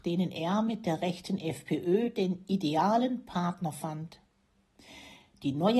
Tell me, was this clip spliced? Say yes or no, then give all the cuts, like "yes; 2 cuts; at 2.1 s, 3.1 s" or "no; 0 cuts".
no; 0 cuts